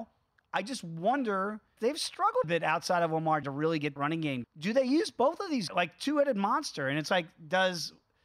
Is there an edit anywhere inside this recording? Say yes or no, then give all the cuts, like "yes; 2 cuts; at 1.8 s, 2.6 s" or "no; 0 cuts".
yes; 6 cuts; at 1.8 s, 2.4 s, 3.4 s, 4.0 s, 4.4 s, 5.7 s